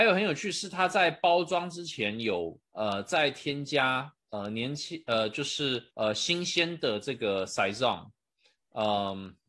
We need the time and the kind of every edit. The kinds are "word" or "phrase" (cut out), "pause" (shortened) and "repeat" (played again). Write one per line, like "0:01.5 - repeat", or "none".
0:02.7 - pause
0:05.9 - pause